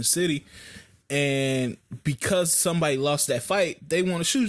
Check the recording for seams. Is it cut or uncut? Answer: uncut